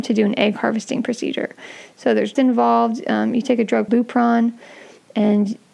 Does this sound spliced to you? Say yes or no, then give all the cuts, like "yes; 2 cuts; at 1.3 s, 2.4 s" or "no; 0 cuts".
yes; 2 cuts; at 2.4 s, 3.9 s